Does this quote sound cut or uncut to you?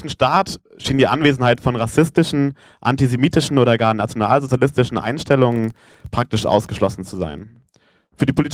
uncut